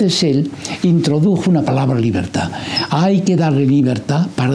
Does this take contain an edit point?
yes; 1 cut; at 1.6 s

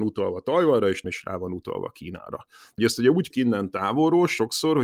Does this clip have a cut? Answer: yes; 3 cuts; at 1.0 s, 2.8 s, 3.3 s

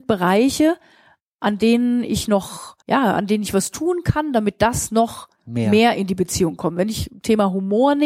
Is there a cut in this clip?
yes; 1 cut; at 2.8 s

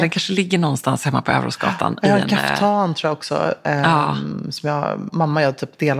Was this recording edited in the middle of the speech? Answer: yes; 1 cut; at 5.1 s

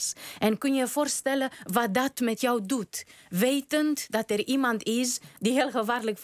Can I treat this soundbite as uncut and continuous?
yes; 0 cuts

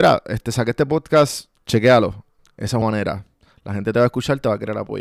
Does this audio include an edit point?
yes; 2 cuts; at 2.4 s, 2.8 s

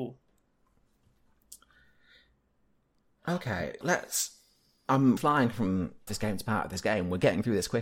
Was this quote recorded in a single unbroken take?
no; 3 cuts; at 3.8 s, 5.2 s, 6.1 s

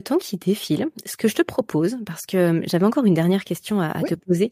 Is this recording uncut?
yes; 0 cuts

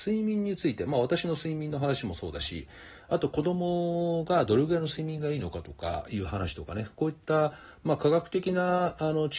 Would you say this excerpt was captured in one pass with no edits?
yes; 0 cuts

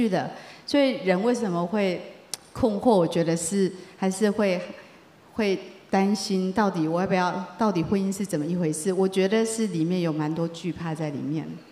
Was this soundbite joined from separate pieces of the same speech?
no; 0 cuts

